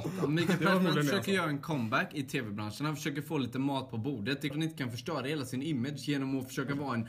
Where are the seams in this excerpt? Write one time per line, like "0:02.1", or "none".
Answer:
0:04.5